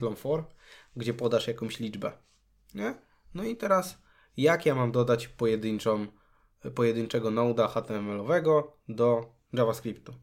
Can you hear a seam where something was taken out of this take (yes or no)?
no